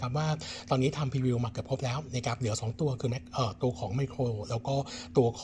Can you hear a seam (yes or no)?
no